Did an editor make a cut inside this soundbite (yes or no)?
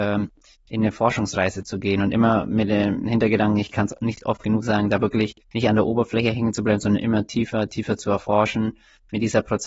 yes